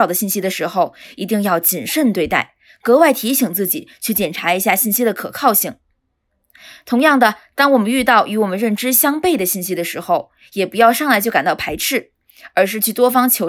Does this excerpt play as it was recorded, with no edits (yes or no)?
yes